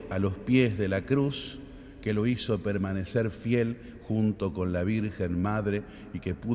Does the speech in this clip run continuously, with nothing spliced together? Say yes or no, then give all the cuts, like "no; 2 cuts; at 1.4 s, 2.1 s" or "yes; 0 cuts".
yes; 0 cuts